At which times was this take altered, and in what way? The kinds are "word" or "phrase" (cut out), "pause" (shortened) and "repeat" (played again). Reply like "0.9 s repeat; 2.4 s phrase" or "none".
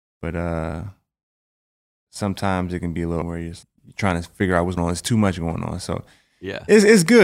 3.2 s word; 3.6 s word; 4.8 s word

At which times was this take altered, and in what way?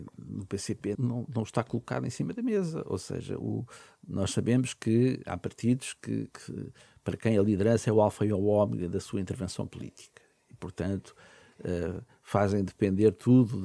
0.9 s word

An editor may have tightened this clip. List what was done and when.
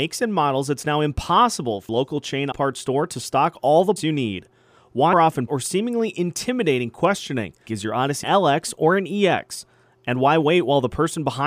1.9 s word; 2.5 s word; 4.0 s word; 5.1 s word; 5.5 s word; 7.7 s word; 8.2 s word

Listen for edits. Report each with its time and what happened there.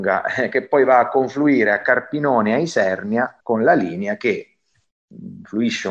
3.4 s pause

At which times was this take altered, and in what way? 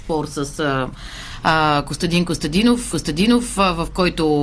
2.9 s repeat

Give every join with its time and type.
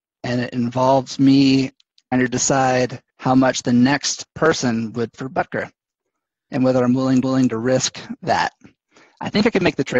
2.1 s word; 3.1 s pause; 5.1 s word; 6.3 s pause; 7.2 s repeat

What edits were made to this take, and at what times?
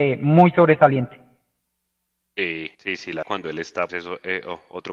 2.7 s pause; 3.2 s phrase; 3.9 s word

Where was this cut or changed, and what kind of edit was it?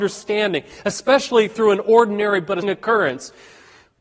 2.6 s word

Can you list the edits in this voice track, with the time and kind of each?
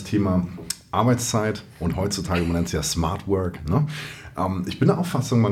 1.7 s pause

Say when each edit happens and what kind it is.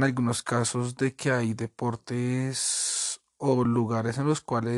none

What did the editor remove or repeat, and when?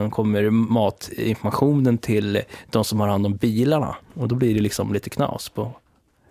none

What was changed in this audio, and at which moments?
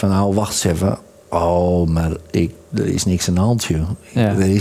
none

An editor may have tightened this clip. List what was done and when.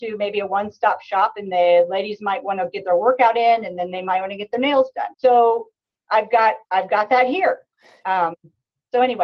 5.1 s pause; 6.6 s pause

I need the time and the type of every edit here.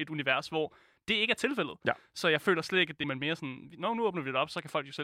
3.0 s phrase

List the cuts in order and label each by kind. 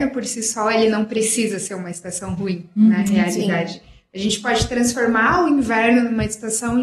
none

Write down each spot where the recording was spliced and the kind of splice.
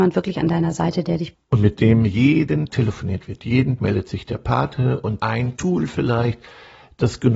1.3 s word; 2.7 s word; 3.8 s word; 5.2 s word; 5.6 s word

